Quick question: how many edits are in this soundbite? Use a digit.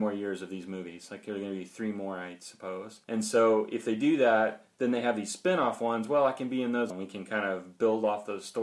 2